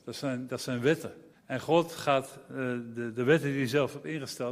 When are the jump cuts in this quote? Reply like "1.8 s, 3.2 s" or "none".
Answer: 1.3 s